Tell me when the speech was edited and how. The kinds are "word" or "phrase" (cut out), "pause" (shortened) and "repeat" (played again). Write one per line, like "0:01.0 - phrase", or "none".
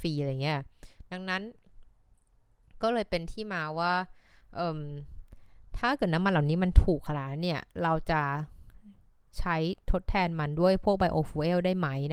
none